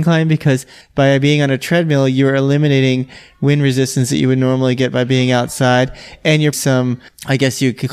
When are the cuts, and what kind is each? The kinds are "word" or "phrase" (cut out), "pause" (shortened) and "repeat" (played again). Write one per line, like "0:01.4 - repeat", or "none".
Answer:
0:06.5 - phrase